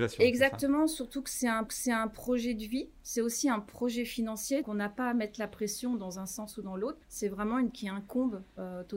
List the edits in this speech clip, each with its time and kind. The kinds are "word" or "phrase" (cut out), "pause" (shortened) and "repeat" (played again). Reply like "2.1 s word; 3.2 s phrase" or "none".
1.7 s repeat; 4.6 s word; 7.0 s pause; 7.7 s word